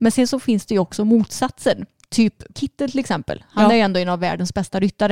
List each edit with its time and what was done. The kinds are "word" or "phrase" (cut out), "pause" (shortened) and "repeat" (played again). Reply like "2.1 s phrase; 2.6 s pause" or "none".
2.5 s word